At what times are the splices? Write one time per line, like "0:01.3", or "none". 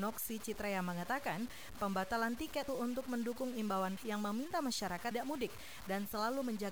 0:01.8
0:02.7
0:04.0
0:05.1